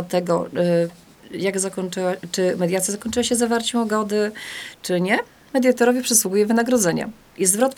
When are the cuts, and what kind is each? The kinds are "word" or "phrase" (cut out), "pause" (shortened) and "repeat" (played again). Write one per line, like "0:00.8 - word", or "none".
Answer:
0:04.7 - word